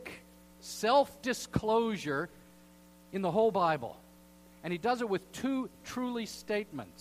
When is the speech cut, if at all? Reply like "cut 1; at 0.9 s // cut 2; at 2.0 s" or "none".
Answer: cut 1; at 5.8 s